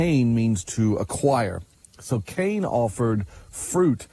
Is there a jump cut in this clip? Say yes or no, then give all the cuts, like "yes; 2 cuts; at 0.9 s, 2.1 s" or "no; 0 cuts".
no; 0 cuts